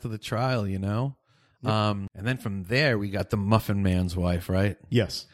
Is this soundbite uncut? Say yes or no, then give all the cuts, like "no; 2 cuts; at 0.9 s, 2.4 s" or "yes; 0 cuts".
yes; 0 cuts